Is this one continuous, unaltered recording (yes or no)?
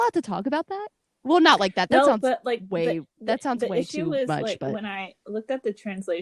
yes